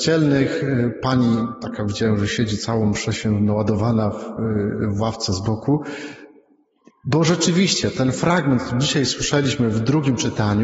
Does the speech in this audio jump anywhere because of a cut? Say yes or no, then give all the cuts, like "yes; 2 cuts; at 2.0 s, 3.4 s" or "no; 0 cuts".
no; 0 cuts